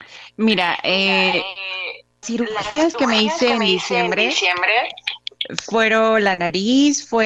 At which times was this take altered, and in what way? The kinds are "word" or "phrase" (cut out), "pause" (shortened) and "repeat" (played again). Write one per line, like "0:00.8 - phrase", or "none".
0:02.2 - word